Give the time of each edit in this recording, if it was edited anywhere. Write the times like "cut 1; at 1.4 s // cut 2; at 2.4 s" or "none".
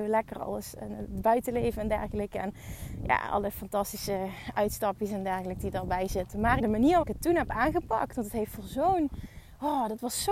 cut 1; at 6.6 s // cut 2; at 7.0 s